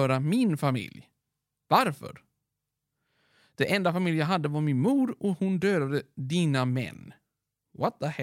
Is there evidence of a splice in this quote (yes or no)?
no